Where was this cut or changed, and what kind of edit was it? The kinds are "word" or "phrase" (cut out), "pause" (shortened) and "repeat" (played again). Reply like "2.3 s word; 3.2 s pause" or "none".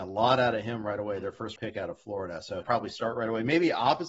1.6 s word; 2.6 s phrase